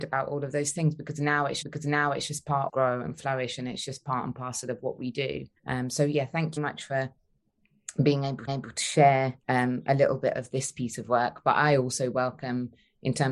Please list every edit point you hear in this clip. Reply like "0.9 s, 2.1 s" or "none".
1.6 s, 2.7 s, 5.6 s, 6.6 s, 8.5 s, 9.4 s